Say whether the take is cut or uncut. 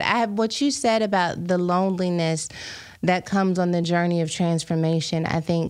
uncut